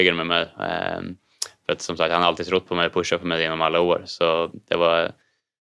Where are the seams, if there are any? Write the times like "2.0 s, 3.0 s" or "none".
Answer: none